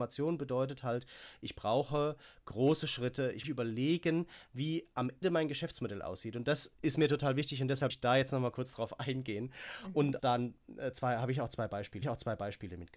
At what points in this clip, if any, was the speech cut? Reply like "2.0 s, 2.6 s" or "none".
3.4 s, 5.2 s, 7.9 s, 10.2 s, 12.0 s